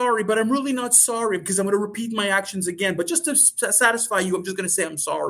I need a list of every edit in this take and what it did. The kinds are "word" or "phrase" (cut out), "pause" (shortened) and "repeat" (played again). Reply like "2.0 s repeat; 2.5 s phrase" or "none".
none